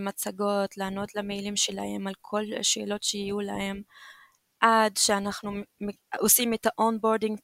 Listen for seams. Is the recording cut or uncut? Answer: uncut